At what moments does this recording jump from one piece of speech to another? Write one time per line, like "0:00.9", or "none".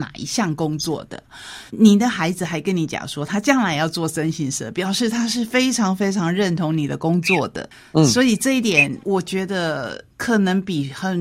0:01.7
0:09.0
0:10.1